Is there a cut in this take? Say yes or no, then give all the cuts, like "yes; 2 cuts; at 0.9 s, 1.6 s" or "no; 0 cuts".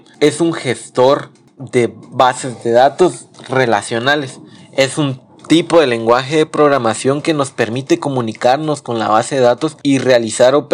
no; 0 cuts